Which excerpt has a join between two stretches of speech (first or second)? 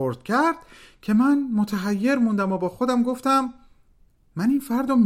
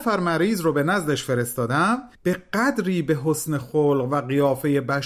second